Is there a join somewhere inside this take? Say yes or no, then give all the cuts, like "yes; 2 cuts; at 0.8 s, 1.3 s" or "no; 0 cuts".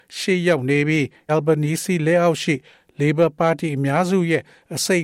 yes; 1 cut; at 1.3 s